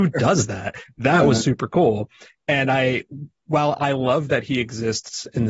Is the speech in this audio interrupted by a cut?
no; 0 cuts

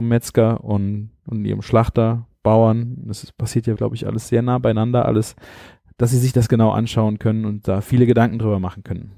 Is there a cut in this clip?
yes; 2 cuts; at 3.8 s, 6.5 s

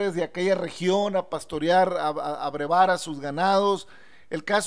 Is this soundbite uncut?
yes; 0 cuts

